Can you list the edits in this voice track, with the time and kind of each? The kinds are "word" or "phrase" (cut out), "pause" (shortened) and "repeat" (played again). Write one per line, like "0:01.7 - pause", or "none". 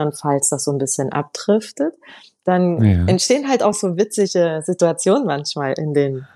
none